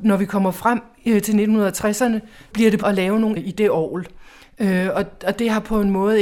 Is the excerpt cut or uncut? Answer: cut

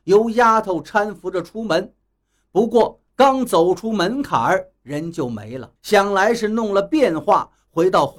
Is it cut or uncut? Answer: cut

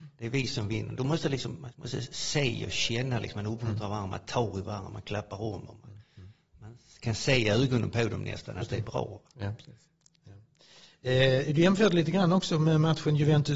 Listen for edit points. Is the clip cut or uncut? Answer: uncut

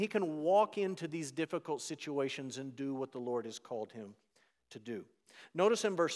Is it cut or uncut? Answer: uncut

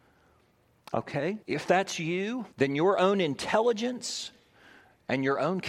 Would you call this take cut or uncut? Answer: cut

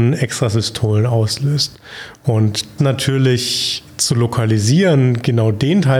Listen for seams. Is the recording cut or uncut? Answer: cut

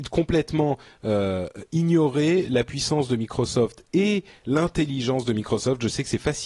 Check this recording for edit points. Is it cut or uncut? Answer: uncut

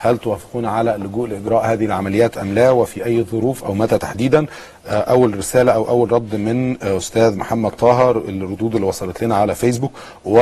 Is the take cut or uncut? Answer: uncut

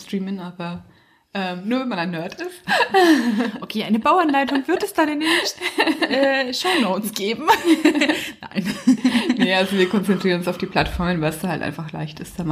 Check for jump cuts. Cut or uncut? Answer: uncut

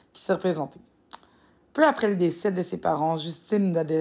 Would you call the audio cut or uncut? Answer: uncut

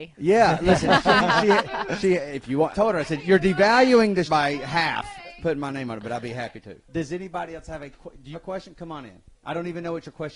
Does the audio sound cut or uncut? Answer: cut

